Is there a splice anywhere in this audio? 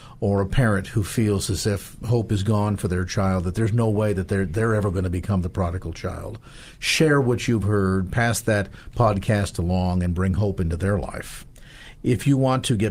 no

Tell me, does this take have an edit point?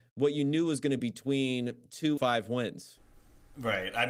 yes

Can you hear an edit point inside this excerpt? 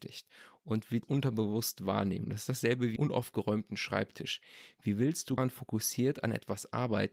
yes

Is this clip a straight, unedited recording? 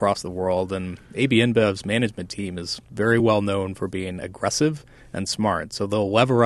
yes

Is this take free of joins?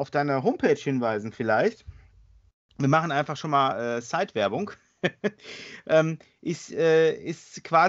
yes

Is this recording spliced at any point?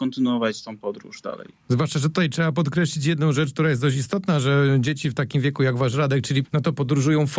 yes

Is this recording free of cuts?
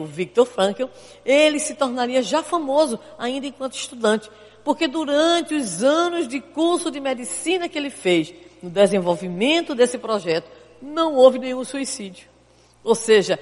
yes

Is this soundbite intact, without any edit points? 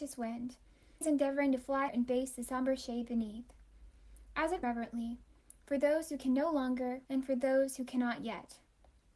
no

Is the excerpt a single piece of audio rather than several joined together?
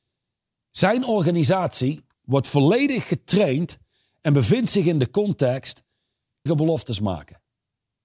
no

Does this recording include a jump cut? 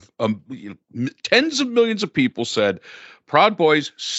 no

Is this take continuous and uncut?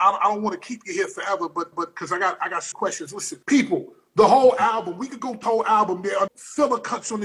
no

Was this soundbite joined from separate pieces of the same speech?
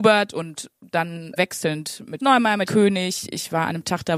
yes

